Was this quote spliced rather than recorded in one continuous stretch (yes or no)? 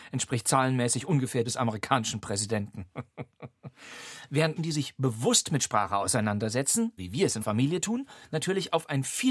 yes